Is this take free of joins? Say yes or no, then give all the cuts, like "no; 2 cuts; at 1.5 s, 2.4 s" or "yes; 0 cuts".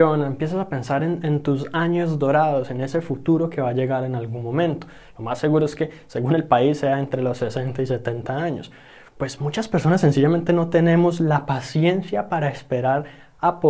yes; 0 cuts